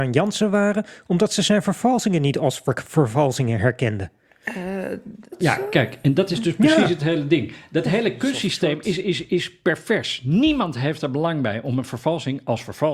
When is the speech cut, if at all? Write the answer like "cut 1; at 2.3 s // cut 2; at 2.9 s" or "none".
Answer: none

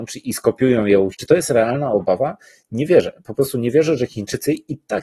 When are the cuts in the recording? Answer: cut 1; at 1.1 s

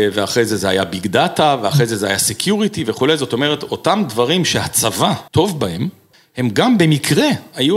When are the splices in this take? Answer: cut 1; at 5.3 s // cut 2; at 6.1 s

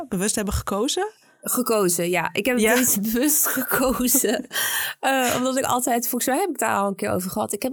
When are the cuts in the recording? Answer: none

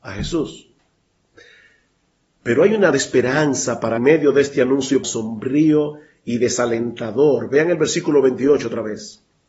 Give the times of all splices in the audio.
cut 1; at 2.9 s // cut 2; at 4.0 s // cut 3; at 5.0 s

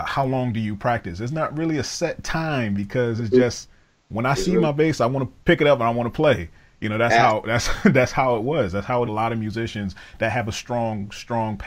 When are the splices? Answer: cut 1; at 5.4 s // cut 2; at 9.1 s

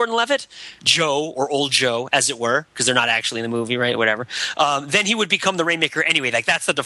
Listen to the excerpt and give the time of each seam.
none

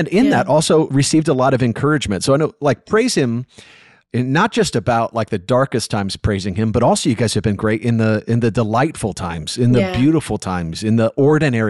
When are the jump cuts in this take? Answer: none

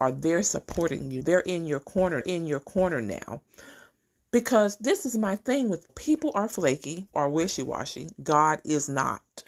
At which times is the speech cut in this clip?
cut 1; at 1.2 s // cut 2; at 2.2 s // cut 3; at 5.9 s // cut 4; at 7.1 s

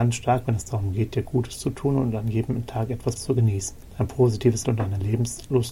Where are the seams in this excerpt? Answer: cut 1; at 3.2 s // cut 2; at 4.6 s

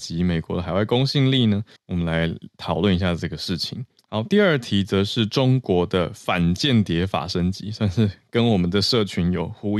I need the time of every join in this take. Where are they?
cut 1; at 1.8 s

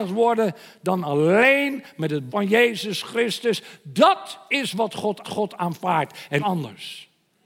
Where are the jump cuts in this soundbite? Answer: cut 1; at 2.3 s // cut 2; at 5.2 s // cut 3; at 6.4 s

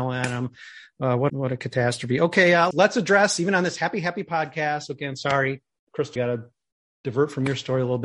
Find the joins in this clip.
cut 1; at 1.3 s // cut 2; at 2.7 s // cut 3; at 6.2 s

